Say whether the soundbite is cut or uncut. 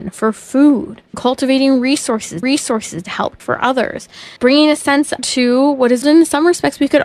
cut